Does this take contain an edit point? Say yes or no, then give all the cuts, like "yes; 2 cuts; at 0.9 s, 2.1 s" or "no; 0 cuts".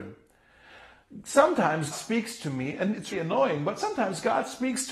yes; 2 cuts; at 1.9 s, 3.1 s